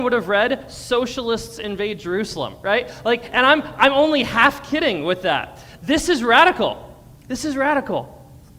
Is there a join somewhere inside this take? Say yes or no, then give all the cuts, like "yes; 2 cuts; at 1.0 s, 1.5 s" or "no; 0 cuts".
no; 0 cuts